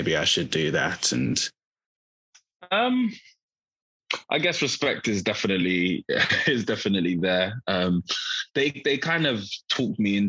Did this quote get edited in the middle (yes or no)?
no